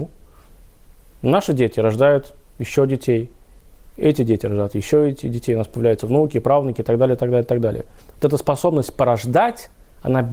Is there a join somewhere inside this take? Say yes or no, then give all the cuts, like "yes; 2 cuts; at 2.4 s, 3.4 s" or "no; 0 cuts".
no; 0 cuts